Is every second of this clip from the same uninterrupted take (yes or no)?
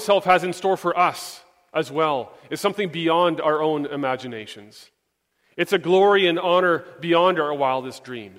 yes